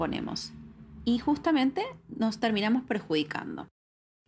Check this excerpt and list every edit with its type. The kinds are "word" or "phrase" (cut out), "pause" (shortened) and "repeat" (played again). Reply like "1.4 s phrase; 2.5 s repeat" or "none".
none